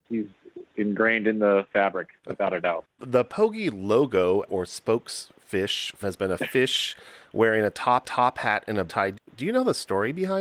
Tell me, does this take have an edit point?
yes; 6 cuts; at 2.2 s, 2.9 s, 6.0 s, 8.0 s, 8.9 s, 9.3 s

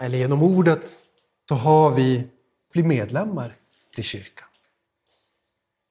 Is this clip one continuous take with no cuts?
no; 3 cuts; at 1.5 s, 2.7 s, 3.9 s

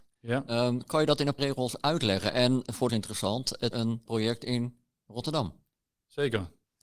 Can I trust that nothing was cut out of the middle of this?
no; 4 cuts; at 1.4 s, 2.9 s, 3.7 s, 4.1 s

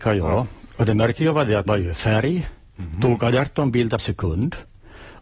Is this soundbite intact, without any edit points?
no; 2 cuts; at 1.7 s, 4.0 s

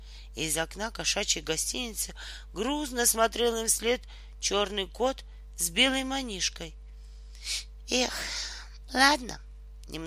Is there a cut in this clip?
no; 0 cuts

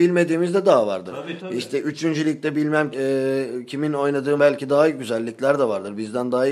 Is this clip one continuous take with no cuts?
no; 3 cuts; at 1.4 s, 2.9 s, 4.4 s

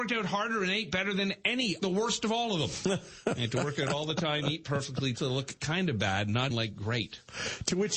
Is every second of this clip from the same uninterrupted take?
no; 3 cuts; at 1.8 s, 5.1 s, 6.5 s

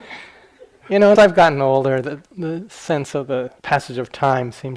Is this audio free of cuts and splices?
no; 3 cuts; at 1.2 s, 2.3 s, 3.6 s

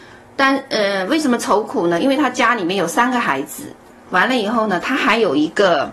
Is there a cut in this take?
no; 0 cuts

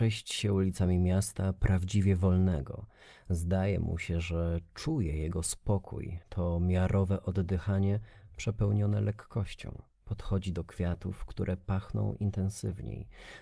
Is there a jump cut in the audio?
yes; 2 cuts; at 6.2 s, 9.9 s

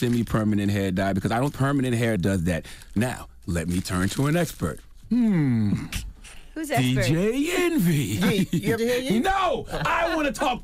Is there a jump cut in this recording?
yes; 3 cuts; at 1.5 s, 2.2 s, 8.8 s

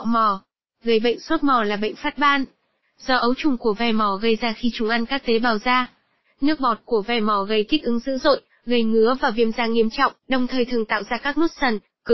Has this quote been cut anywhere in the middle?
no; 0 cuts

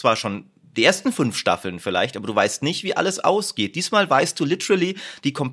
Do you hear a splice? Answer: no; 0 cuts

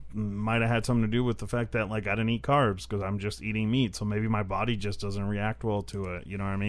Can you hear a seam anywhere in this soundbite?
no; 0 cuts

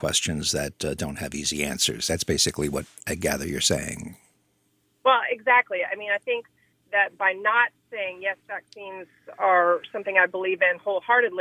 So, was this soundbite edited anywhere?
no; 0 cuts

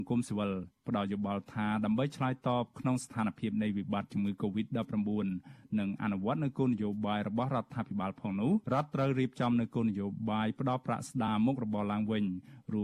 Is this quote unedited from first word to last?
no; 1 cut; at 8.6 s

